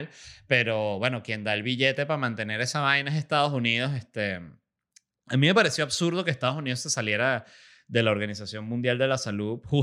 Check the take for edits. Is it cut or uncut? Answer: uncut